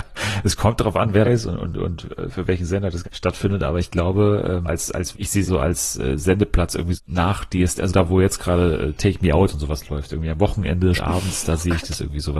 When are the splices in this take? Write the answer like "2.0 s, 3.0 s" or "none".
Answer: 1.2 s, 3.0 s, 4.7 s, 5.1 s, 5.5 s, 6.9 s, 7.9 s, 11.0 s